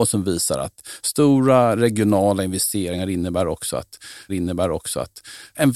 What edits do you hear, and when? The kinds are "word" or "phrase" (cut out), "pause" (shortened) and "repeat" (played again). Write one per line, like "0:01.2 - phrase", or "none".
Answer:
0:04.3 - repeat